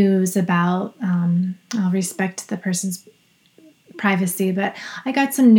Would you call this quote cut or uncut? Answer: uncut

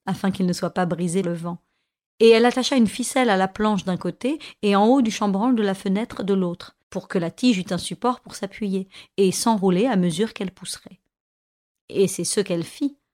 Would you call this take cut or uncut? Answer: cut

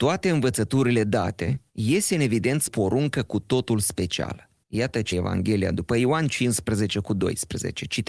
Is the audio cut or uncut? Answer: cut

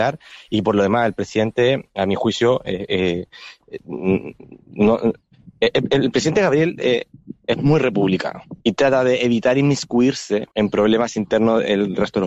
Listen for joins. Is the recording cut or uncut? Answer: cut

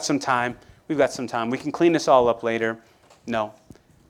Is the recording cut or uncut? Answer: uncut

